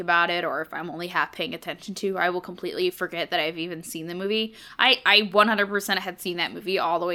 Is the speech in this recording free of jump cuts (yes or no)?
yes